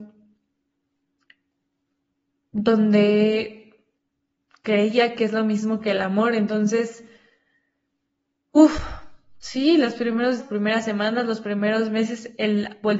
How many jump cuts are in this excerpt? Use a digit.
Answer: 2